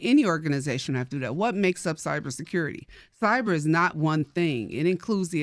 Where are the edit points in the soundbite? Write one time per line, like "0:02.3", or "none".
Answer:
none